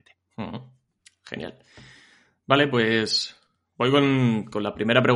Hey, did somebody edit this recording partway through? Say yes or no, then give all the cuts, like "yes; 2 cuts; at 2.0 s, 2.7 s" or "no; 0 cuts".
no; 0 cuts